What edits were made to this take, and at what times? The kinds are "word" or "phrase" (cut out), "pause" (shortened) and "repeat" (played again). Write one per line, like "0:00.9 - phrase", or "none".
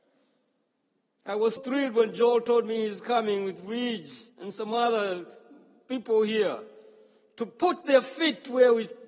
0:01.6 - word
0:04.3 - pause